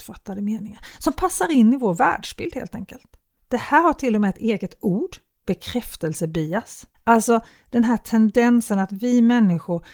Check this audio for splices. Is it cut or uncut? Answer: cut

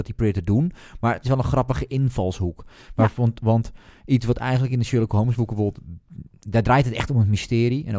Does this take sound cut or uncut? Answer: uncut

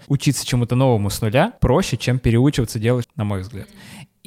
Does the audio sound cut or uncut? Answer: cut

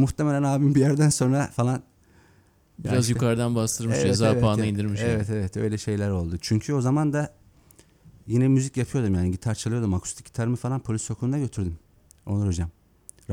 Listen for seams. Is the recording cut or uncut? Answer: uncut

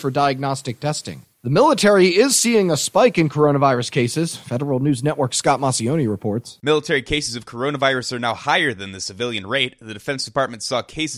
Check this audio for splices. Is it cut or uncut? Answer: cut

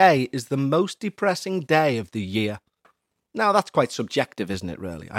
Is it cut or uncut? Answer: uncut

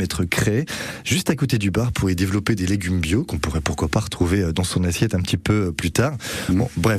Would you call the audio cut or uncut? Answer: uncut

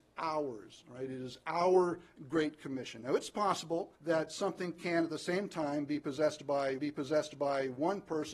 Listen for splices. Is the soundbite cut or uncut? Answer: cut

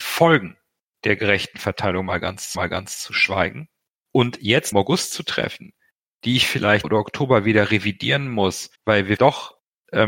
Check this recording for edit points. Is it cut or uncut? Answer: cut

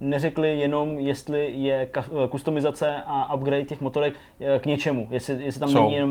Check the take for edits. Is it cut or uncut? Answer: uncut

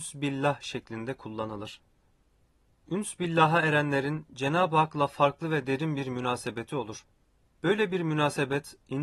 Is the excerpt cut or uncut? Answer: uncut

